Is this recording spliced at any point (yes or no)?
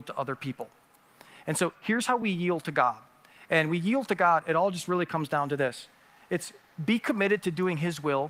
no